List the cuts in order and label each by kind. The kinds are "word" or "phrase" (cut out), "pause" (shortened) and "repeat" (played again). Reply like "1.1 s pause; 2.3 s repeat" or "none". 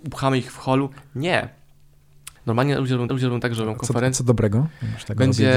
2.4 s pause; 3.1 s repeat